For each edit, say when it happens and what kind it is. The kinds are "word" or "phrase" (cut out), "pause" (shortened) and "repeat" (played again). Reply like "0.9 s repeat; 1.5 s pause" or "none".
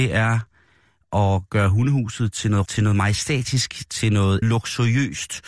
2.7 s word; 4.4 s phrase